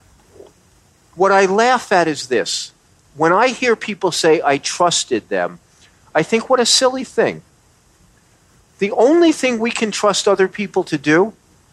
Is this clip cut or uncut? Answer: uncut